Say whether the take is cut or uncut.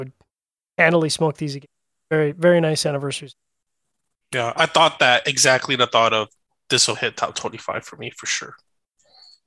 uncut